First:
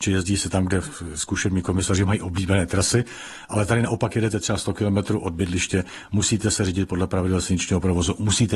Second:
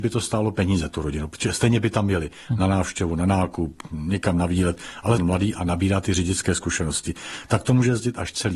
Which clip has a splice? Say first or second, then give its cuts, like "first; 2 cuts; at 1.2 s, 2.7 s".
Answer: second; 1 cut; at 5.2 s